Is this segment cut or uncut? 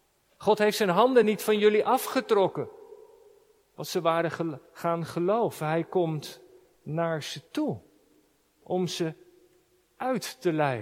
uncut